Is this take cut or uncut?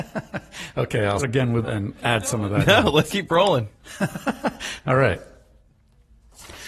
cut